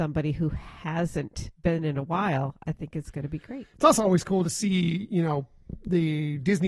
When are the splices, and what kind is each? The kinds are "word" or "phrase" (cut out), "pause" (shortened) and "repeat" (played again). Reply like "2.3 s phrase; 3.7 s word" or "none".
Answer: none